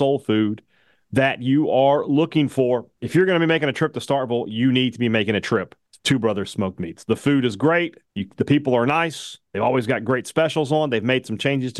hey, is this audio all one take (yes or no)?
no